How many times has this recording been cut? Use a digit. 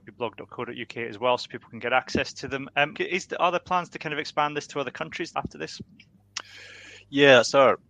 2